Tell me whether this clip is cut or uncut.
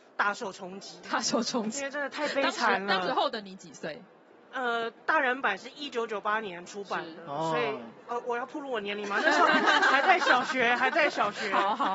uncut